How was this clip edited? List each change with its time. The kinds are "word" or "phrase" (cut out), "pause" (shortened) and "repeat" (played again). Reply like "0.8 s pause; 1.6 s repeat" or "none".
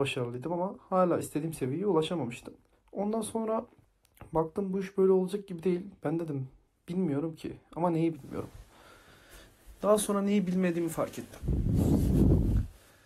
none